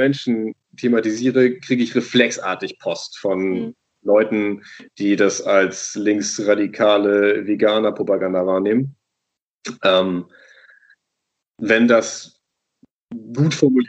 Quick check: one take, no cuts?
yes; 0 cuts

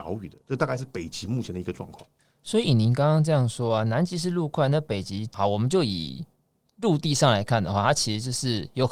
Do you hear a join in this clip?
no; 0 cuts

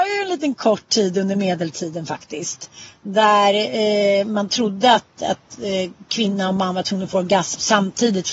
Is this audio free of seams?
yes; 0 cuts

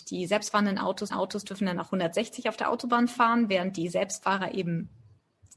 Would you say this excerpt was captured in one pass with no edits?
no; 1 cut; at 1.1 s

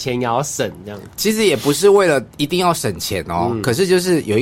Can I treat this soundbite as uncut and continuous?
no; 1 cut; at 1.1 s

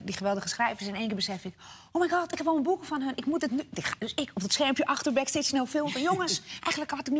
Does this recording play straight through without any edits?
yes; 0 cuts

